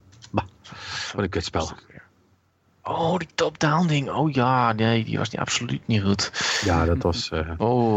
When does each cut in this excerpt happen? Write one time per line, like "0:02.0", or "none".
none